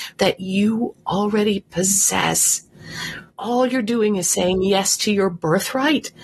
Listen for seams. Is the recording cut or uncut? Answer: uncut